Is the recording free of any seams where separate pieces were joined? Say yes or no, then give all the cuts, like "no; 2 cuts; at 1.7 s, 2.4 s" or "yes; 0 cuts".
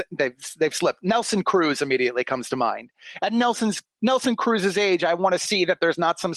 yes; 0 cuts